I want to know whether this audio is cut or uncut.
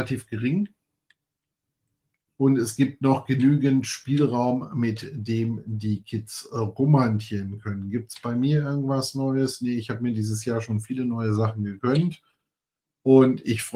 uncut